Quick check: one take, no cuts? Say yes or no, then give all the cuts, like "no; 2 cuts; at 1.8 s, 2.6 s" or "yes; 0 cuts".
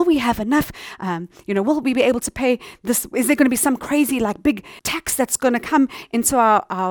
no; 1 cut; at 4.8 s